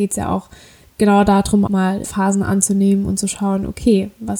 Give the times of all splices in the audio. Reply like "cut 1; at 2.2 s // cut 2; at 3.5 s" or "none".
cut 1; at 1.7 s // cut 2; at 2.0 s